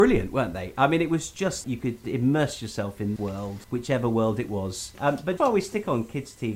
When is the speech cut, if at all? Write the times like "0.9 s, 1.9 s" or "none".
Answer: 1.6 s, 2.0 s, 3.2 s, 3.6 s, 5.4 s